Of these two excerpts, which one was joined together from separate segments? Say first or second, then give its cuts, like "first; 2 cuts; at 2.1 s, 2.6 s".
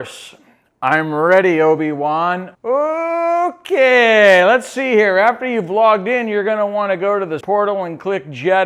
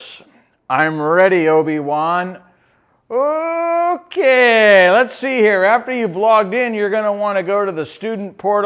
first; 2 cuts; at 2.5 s, 7.4 s